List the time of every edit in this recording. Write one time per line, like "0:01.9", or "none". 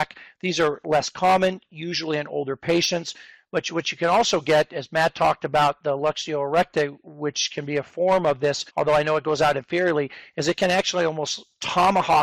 0:08.7

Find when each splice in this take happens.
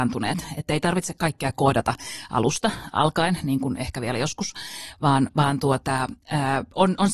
none

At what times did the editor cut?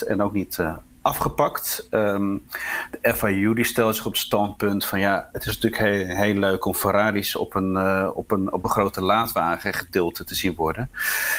0:05.3

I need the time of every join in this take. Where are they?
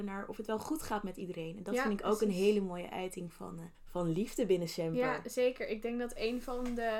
0:03.7

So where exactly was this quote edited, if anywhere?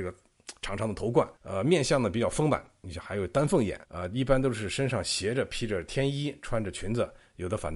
0:01.4
0:03.8

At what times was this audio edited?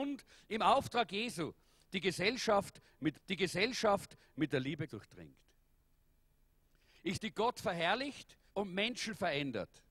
0:03.1
0:04.9
0:07.1
0:08.5

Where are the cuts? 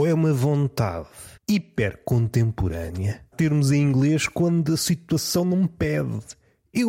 0:01.4
0:03.3

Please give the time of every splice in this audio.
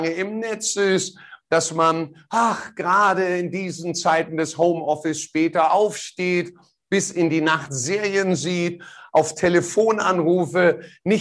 none

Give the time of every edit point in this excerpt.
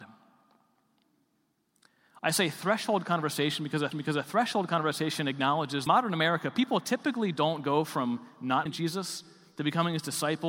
0:03.9
0:05.9
0:08.7

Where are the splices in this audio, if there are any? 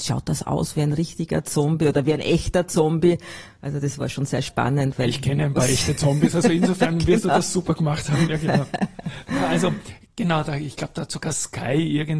none

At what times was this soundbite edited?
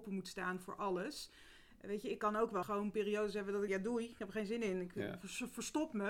0:02.6
0:03.7

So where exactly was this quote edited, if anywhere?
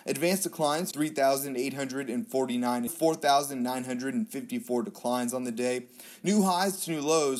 0:00.9
0:02.9

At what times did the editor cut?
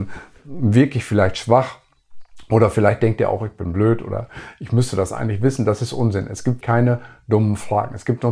0:06.6

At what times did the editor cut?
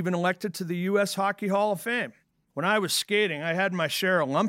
none

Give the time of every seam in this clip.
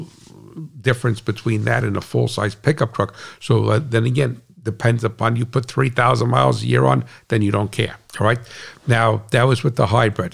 none

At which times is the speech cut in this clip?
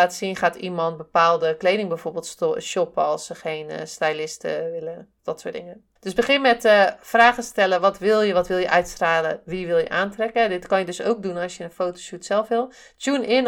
0:05.2
0:06.0

